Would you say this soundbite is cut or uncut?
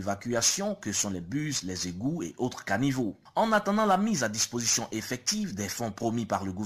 uncut